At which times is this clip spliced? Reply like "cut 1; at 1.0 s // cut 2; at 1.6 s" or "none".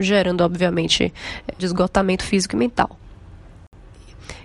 cut 1; at 1.6 s